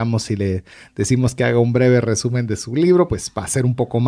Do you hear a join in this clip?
no; 0 cuts

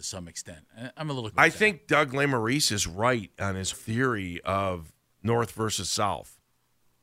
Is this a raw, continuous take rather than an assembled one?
no; 2 cuts; at 1.3 s, 3.7 s

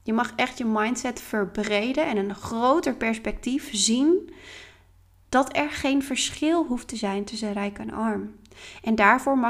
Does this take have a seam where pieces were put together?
no; 0 cuts

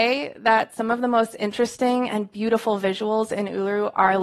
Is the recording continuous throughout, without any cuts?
yes; 0 cuts

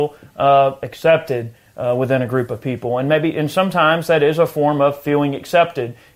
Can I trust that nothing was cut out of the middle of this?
yes; 0 cuts

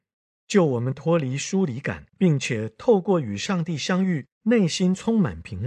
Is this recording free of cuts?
no; 2 cuts; at 2.1 s, 4.3 s

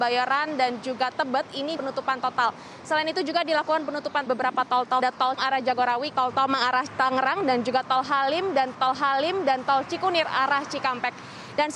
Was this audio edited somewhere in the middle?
yes; 6 cuts; at 1.8 s, 4.3 s, 5.0 s, 5.4 s, 6.1 s, 8.7 s

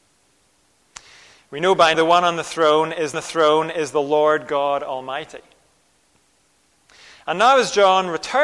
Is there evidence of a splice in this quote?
yes; 2 cuts; at 1.9 s, 3.1 s

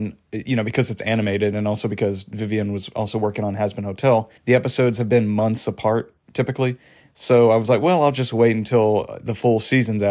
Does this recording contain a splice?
yes; 2 cuts; at 4.4 s, 6.2 s

